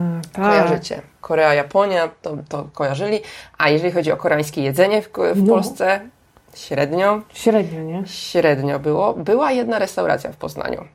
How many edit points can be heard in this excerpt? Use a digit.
0